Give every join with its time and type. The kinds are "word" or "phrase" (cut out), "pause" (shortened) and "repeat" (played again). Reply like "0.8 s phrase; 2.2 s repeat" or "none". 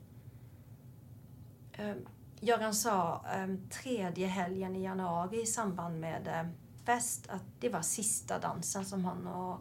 6.8 s word; 7.5 s word